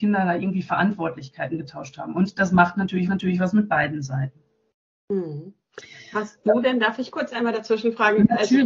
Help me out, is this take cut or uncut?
cut